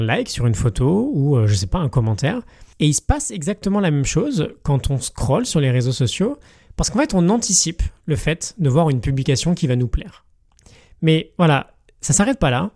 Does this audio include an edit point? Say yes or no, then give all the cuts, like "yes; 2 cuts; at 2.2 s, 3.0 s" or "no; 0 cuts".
no; 0 cuts